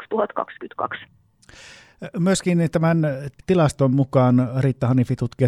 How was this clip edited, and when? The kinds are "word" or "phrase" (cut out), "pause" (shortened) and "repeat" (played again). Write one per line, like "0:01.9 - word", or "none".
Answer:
0:03.4 - word